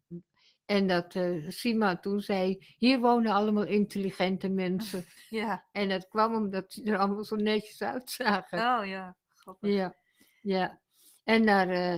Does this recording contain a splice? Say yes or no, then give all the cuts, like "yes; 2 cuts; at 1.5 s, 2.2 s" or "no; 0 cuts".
no; 0 cuts